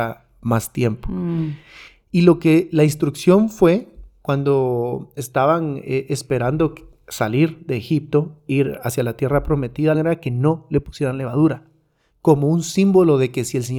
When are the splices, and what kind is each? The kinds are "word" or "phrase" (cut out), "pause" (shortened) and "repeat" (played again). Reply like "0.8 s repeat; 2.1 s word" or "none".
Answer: 9.9 s phrase